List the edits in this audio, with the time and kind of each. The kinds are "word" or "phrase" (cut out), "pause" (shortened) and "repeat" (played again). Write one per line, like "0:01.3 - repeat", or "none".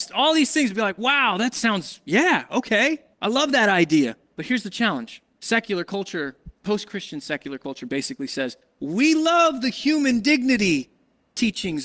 0:03.1 - pause
0:05.3 - pause
0:06.6 - pause